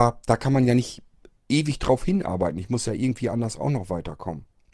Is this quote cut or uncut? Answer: uncut